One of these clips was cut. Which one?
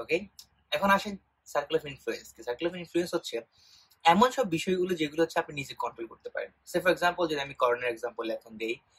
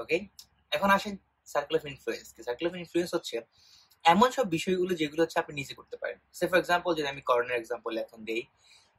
second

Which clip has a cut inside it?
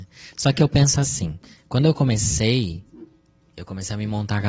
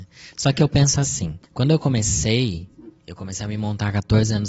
second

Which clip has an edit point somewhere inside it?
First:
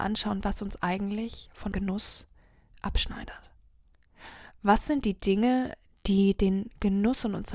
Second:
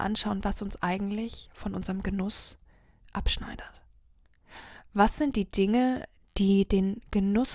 first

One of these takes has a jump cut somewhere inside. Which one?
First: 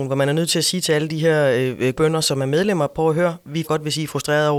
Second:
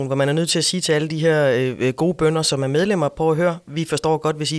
first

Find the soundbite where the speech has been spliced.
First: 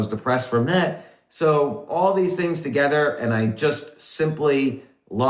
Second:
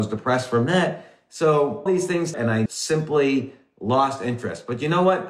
second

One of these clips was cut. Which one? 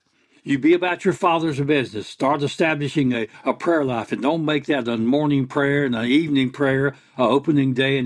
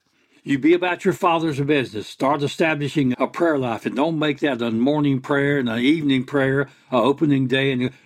second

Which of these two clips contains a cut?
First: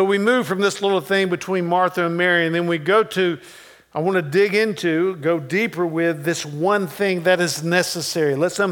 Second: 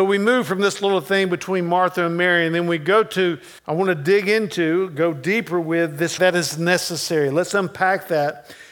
second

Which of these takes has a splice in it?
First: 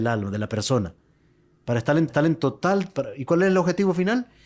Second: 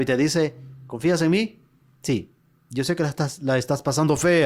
first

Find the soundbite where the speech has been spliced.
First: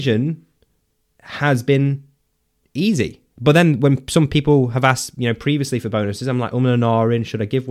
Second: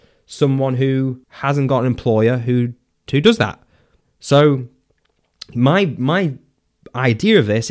second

